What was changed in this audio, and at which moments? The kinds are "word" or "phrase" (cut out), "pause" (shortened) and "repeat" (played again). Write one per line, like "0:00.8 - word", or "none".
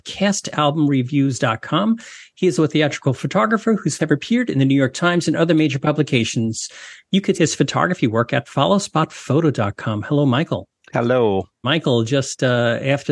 0:02.6 - word
0:04.0 - word
0:07.3 - word
0:11.6 - word